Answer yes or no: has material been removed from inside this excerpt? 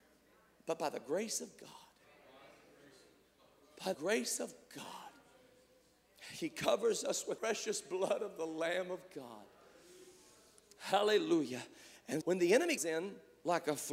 yes